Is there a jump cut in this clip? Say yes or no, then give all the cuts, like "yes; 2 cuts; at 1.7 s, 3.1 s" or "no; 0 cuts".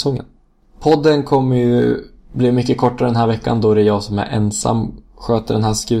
no; 0 cuts